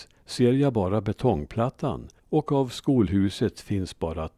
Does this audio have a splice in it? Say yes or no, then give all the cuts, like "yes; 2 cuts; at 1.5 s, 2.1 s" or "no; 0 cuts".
yes; 1 cut; at 2.2 s